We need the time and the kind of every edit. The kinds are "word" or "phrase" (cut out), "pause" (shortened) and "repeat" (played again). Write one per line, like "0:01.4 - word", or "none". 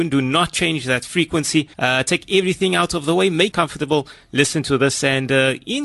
0:01.7 - pause
0:03.5 - word